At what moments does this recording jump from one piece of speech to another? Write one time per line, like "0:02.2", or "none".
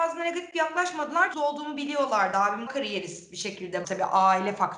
0:01.3
0:02.7
0:03.8